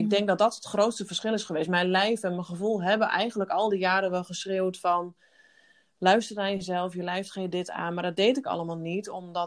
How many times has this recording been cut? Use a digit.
0